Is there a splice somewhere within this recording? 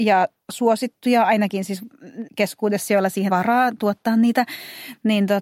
yes; 2 cuts; at 2.3 s, 3.3 s

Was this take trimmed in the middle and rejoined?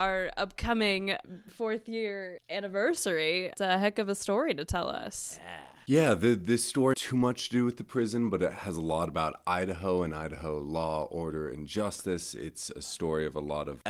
yes; 2 cuts; at 3.5 s, 6.9 s

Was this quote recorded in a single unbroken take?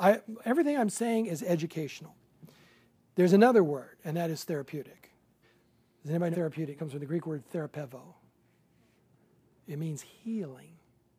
no; 3 cuts; at 5.4 s, 6.3 s, 6.8 s

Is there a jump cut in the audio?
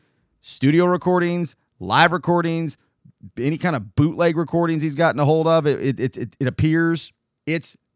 no; 0 cuts

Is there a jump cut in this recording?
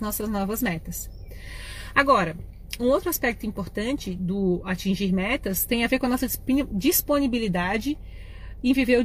no; 0 cuts

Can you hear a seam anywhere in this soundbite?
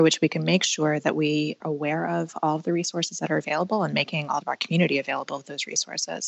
yes; 2 cuts; at 1.6 s, 4.4 s

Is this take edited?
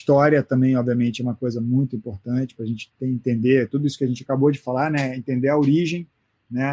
no; 0 cuts

